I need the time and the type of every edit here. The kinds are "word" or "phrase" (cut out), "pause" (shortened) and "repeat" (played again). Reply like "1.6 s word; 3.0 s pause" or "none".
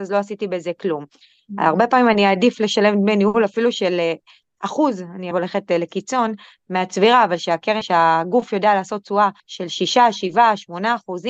5.3 s word; 7.8 s word; 9.4 s pause

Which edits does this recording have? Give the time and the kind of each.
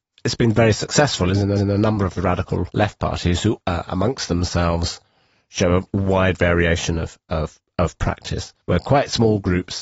1.6 s repeat; 3.6 s word; 8.6 s pause

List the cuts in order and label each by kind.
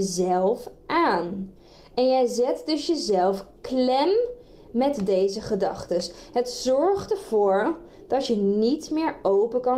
none

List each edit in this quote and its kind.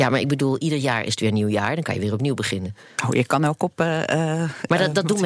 none

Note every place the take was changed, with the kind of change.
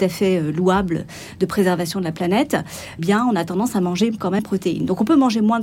3.0 s word; 4.4 s word

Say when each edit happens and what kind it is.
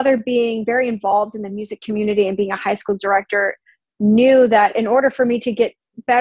none

